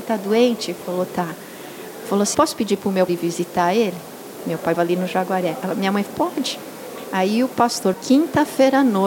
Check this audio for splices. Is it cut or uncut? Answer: cut